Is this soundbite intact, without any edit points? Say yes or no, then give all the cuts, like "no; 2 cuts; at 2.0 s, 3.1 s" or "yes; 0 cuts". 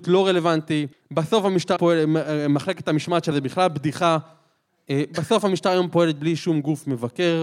no; 3 cuts; at 0.9 s, 1.8 s, 3.3 s